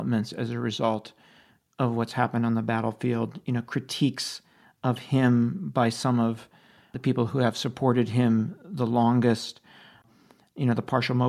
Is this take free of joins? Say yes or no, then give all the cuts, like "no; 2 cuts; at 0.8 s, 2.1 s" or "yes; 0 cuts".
yes; 0 cuts